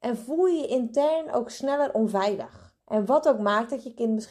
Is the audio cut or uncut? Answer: cut